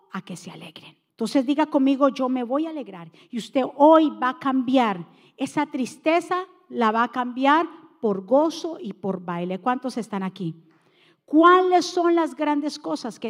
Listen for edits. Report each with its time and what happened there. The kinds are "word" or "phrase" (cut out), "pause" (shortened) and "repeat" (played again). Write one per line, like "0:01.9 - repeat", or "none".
0:01.1 - pause